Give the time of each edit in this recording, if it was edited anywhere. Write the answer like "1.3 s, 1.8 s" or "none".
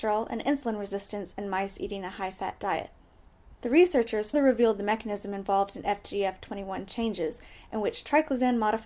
3.6 s, 4.3 s